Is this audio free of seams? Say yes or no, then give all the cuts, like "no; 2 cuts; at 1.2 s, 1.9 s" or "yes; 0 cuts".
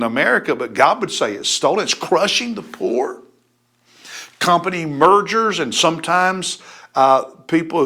yes; 0 cuts